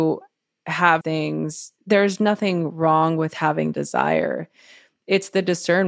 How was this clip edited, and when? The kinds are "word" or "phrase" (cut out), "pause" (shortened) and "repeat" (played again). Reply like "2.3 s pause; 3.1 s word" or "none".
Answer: 1.0 s word; 3.7 s word